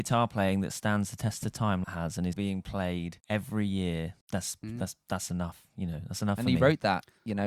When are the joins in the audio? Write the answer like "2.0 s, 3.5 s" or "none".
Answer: 1.8 s, 2.3 s, 3.2 s, 4.2 s